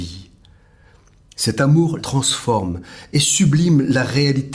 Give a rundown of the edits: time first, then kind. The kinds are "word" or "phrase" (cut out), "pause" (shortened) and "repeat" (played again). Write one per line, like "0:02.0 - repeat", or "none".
0:02.0 - word